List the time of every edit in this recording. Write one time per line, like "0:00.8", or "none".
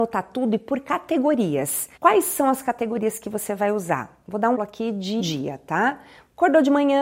0:02.0
0:04.5
0:05.2